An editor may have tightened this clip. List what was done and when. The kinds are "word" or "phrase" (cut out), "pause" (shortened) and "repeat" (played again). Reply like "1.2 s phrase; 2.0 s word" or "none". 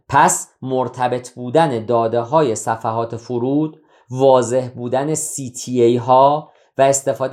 none